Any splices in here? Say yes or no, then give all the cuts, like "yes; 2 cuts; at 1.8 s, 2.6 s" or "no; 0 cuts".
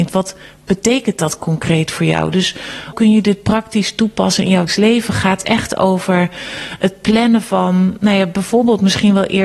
yes; 2 cuts; at 2.9 s, 4.7 s